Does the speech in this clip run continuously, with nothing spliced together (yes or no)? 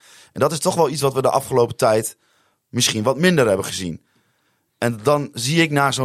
yes